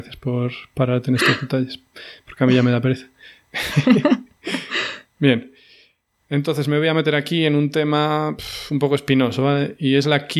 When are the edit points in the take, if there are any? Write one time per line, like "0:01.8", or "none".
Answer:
none